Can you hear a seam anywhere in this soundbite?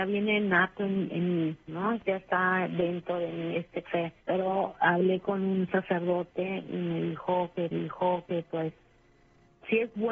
yes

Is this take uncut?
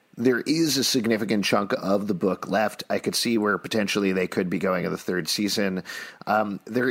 yes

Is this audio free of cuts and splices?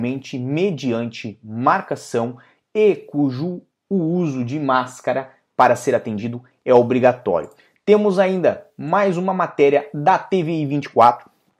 yes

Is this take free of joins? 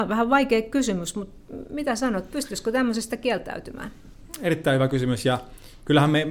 yes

